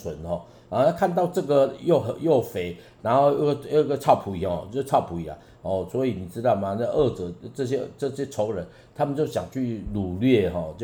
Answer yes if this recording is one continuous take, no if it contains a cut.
yes